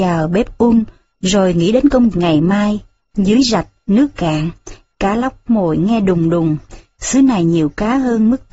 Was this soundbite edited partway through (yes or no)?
yes